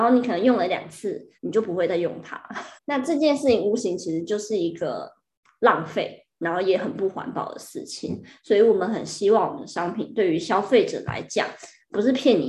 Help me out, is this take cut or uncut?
cut